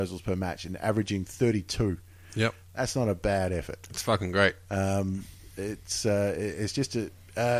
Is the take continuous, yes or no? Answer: yes